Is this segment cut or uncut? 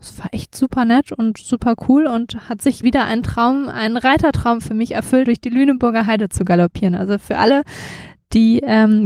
cut